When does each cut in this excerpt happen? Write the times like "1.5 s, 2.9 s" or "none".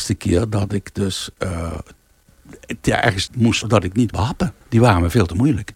3.3 s, 3.6 s, 4.1 s, 4.6 s

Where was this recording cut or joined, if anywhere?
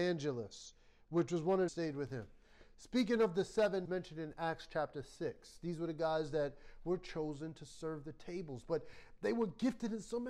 1.7 s, 3.8 s

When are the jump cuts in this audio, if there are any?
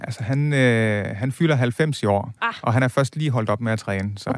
2.4 s

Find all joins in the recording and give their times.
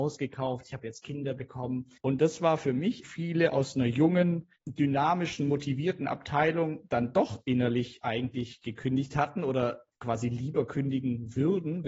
2.0 s, 3.0 s, 4.6 s

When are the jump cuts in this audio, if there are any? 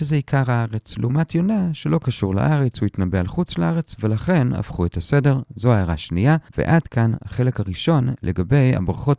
6.5 s

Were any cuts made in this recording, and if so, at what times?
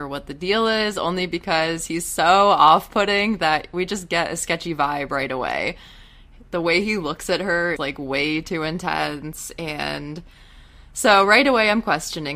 7.8 s

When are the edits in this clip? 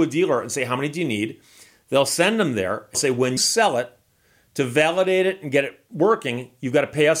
2.9 s, 3.4 s

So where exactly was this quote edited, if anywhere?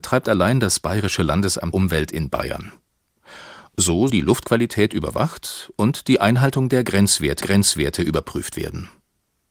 1.7 s, 4.1 s, 7.4 s

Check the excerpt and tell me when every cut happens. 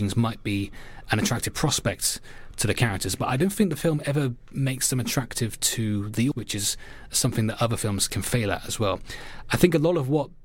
6.3 s, 8.1 s

